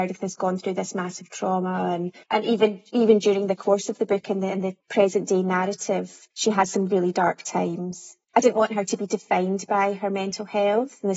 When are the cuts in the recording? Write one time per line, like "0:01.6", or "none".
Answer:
0:02.2
0:04.8
0:06.3
0:08.2